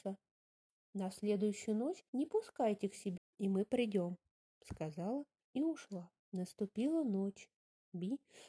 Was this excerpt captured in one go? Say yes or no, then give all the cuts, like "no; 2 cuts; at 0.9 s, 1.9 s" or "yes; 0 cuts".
no; 5 cuts; at 2.1 s, 3.2 s, 4.2 s, 5.4 s, 6.2 s